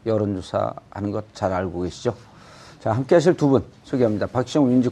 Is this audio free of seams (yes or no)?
yes